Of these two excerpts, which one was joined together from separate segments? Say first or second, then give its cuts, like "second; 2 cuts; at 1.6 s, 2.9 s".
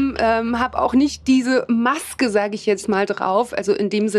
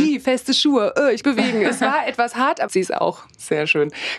second; 2 cuts; at 1.2 s, 2.7 s